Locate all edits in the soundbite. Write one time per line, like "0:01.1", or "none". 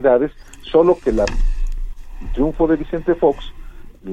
none